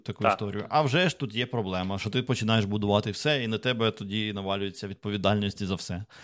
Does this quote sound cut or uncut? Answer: uncut